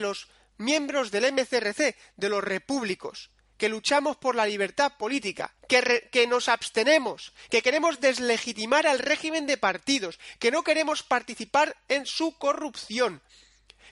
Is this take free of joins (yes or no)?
no